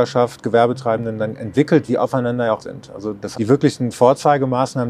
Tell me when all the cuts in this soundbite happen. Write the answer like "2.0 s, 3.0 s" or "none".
1.9 s, 2.6 s, 3.3 s